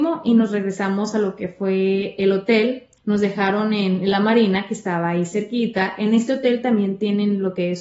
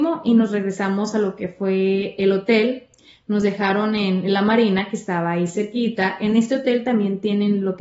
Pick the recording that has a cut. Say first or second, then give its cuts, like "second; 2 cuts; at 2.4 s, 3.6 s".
first; 1 cut; at 3.0 s